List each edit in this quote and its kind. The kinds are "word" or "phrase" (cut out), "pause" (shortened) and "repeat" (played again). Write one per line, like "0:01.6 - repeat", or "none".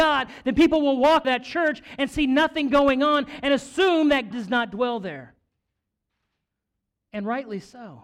0:01.2 - word
0:04.3 - word